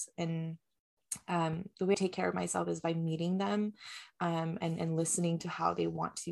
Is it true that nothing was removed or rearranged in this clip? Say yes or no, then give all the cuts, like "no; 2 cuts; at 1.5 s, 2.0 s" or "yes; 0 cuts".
no; 1 cut; at 1.9 s